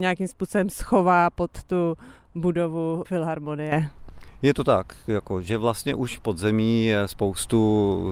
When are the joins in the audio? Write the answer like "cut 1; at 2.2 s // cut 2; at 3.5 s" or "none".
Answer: cut 1; at 3.0 s // cut 2; at 6.2 s

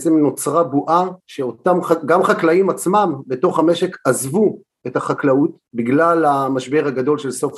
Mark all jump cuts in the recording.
cut 1; at 1.2 s // cut 2; at 5.7 s

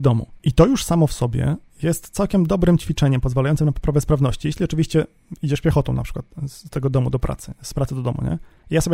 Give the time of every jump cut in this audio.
none

